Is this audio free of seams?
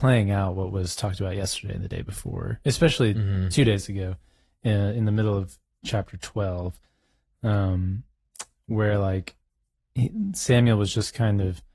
yes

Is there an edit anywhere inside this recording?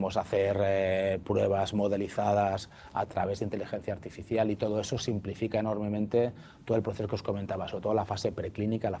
no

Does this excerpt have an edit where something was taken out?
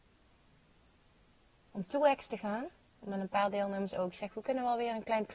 no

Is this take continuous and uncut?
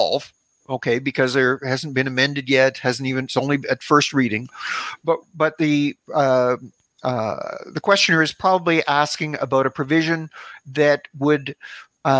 yes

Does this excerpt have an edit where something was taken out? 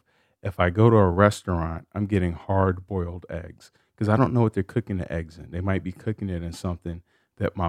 no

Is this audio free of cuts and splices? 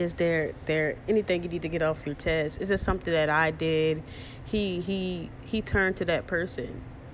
yes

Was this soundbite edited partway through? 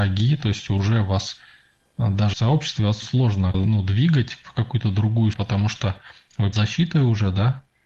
yes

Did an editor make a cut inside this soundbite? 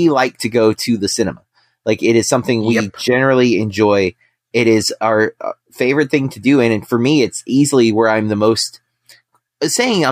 no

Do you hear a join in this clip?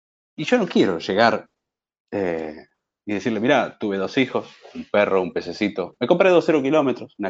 no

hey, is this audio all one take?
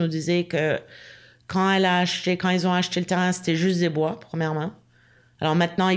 yes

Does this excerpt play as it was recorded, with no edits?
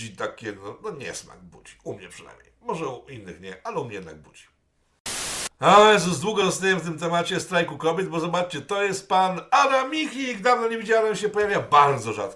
yes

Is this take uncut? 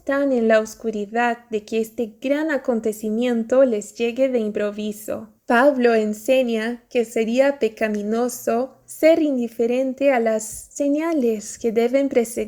no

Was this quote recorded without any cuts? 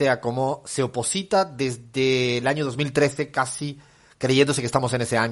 yes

